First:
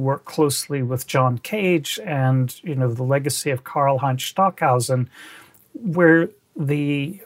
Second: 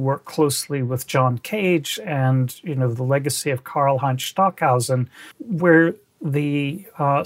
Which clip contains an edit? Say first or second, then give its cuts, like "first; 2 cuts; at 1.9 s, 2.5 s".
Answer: second; 1 cut; at 5.3 s